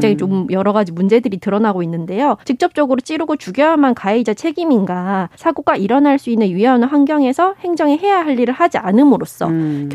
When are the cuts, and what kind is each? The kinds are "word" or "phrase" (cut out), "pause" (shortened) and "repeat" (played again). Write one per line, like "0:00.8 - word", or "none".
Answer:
0:02.4 - pause
0:05.3 - pause